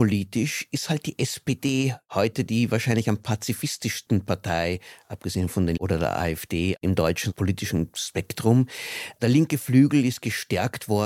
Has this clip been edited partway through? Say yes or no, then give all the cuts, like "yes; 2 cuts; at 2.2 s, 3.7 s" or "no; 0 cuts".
yes; 1 cut; at 5.8 s